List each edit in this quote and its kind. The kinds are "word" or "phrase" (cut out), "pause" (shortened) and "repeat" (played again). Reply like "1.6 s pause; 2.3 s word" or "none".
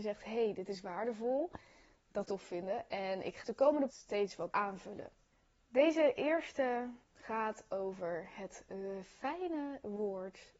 2.2 s phrase; 3.4 s word; 3.9 s word; 4.5 s word; 5.3 s pause; 7.0 s pause